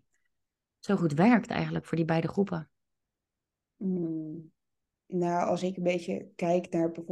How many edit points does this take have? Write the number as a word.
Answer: zero